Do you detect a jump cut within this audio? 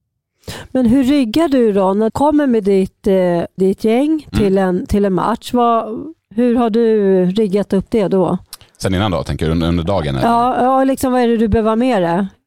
yes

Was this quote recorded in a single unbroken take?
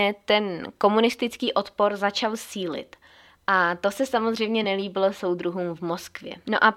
yes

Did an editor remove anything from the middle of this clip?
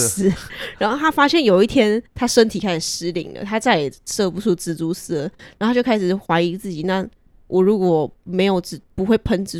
yes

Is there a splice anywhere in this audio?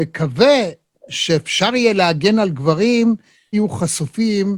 yes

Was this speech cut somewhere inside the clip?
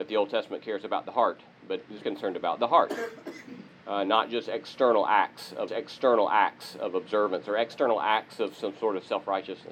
yes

